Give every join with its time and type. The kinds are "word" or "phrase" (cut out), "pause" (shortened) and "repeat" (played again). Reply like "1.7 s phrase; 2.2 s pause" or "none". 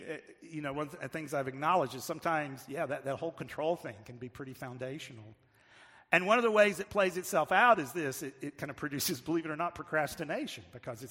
none